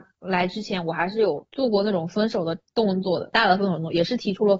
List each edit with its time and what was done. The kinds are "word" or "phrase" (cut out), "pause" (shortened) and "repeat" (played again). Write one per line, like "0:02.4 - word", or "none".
0:01.5 - pause

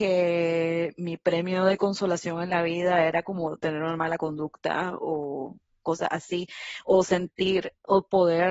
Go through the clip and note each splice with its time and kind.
none

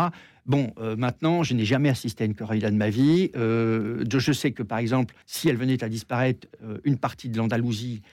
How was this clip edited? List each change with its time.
0:05.2 - pause

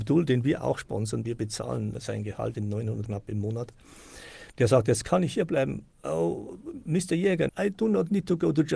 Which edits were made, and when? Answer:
0:01.2 - word
0:02.5 - word
0:03.0 - word
0:07.5 - word

